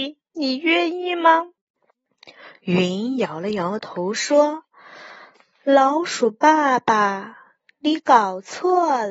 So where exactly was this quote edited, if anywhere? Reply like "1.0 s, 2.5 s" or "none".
1.7 s